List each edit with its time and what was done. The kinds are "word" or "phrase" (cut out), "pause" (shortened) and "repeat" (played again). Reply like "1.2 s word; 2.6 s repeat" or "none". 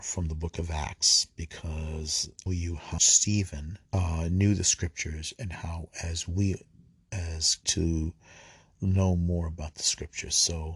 2.5 s phrase; 3.0 s word; 3.9 s pause; 7.6 s phrase